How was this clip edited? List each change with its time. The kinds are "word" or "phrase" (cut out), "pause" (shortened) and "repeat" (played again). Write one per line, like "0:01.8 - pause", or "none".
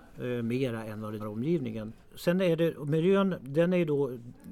0:01.2 - word